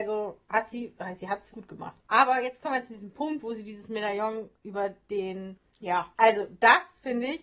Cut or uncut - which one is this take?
cut